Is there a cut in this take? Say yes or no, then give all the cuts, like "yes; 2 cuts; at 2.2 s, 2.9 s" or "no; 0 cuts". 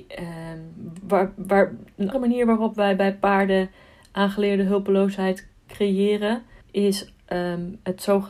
yes; 2 cuts; at 2.1 s, 6.6 s